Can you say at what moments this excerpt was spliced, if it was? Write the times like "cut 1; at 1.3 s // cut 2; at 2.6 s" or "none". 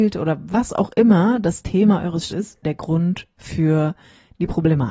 cut 1; at 2.3 s // cut 2; at 2.6 s